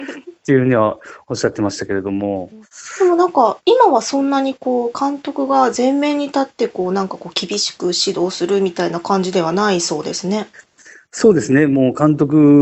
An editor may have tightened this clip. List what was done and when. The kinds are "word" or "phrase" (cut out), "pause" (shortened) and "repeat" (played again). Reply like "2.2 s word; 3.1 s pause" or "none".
2.6 s pause